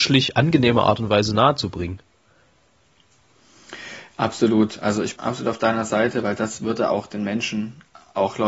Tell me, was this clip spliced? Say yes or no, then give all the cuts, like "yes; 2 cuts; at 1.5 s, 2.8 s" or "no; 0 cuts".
yes; 1 cut; at 5.2 s